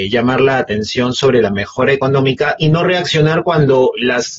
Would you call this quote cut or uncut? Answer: uncut